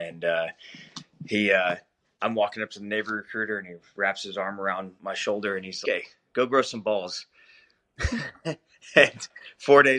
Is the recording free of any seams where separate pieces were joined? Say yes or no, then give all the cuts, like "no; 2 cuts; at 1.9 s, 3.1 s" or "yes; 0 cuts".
no; 2 cuts; at 5.0 s, 5.8 s